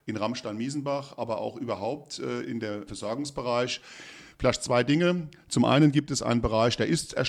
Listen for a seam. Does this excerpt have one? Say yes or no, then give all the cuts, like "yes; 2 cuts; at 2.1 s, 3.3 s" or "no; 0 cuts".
yes; 1 cut; at 2.9 s